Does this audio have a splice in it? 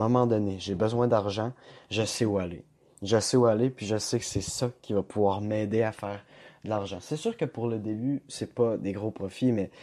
no; 0 cuts

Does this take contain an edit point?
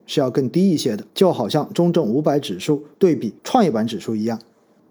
yes; 3 cuts; at 1.1 s, 2.9 s, 3.4 s

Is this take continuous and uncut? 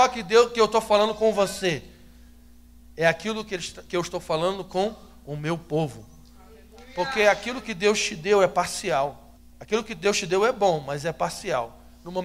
no; 1 cut; at 9.4 s

